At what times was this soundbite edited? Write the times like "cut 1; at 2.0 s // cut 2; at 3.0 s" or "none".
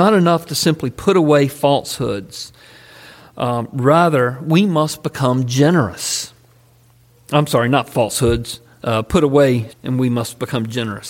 cut 1; at 9.7 s